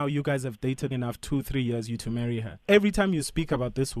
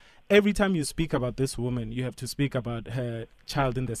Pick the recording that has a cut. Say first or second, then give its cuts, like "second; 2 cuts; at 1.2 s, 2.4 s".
first; 3 cuts; at 0.9 s, 2.0 s, 2.6 s